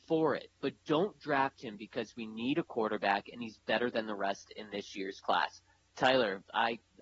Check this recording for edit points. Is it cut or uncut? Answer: uncut